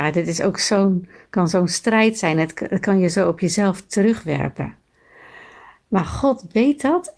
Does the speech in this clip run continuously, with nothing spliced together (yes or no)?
yes